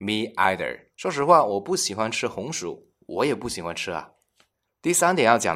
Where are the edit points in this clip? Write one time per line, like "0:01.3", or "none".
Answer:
0:00.9